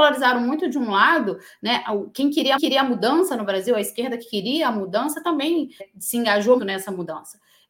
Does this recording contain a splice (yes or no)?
yes